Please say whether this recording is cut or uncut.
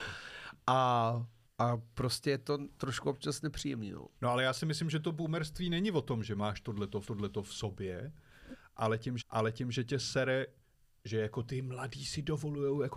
cut